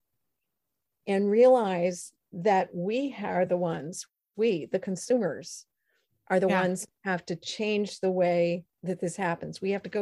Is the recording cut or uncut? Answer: uncut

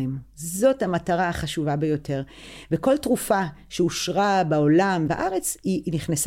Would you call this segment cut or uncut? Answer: cut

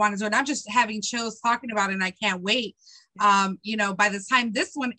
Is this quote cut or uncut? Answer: uncut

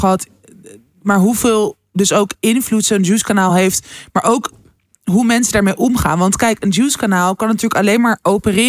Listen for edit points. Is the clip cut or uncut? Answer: uncut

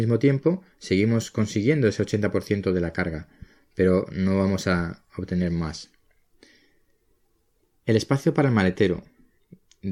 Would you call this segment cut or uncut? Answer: uncut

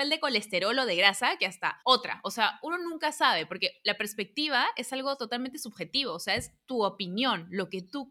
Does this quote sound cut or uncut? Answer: cut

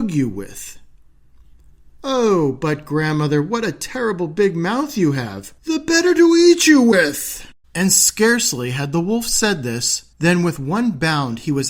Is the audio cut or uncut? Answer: cut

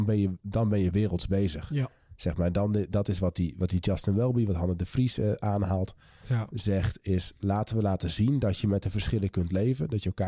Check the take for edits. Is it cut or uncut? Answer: uncut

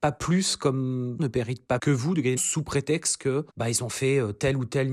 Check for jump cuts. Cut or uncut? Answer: cut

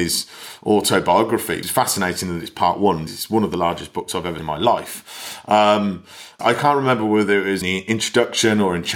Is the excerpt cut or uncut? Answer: cut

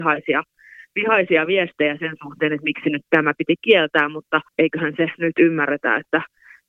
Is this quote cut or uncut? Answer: cut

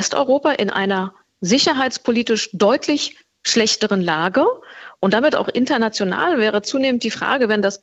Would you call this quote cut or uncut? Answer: uncut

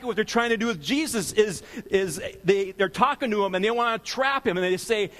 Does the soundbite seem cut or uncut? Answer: uncut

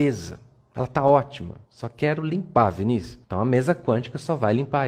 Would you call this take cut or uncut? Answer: cut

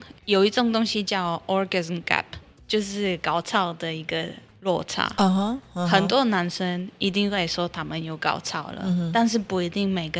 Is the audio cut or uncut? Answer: uncut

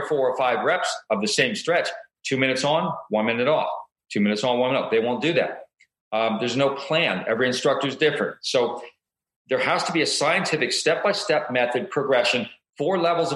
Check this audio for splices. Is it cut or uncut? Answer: uncut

